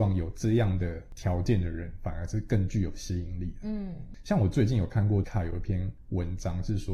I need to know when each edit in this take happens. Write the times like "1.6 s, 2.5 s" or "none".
5.2 s